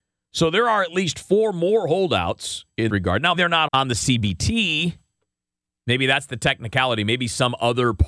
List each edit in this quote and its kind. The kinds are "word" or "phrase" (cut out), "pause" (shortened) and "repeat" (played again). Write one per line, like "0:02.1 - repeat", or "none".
0:02.9 - word
0:03.3 - word
0:03.7 - phrase